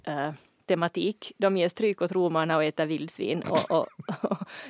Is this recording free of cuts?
yes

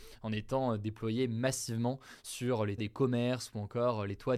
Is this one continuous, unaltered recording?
no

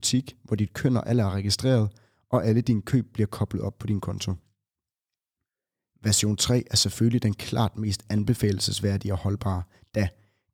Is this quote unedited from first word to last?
yes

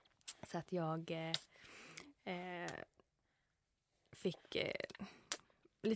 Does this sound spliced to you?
no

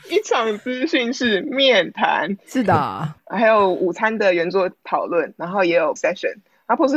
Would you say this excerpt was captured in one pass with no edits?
no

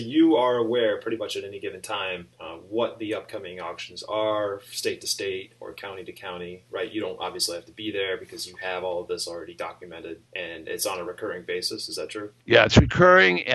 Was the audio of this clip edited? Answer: yes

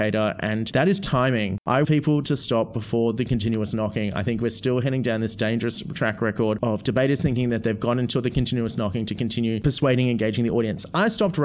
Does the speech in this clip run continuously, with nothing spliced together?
no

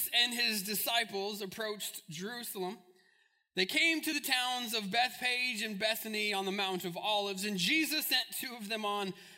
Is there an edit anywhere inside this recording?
no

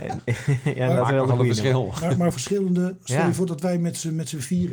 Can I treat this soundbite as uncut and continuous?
no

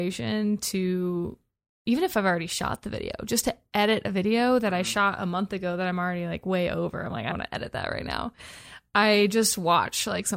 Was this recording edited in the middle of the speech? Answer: yes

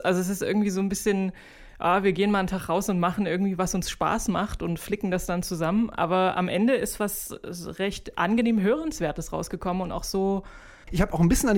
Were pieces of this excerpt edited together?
no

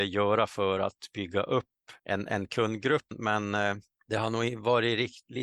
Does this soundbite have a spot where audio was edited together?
yes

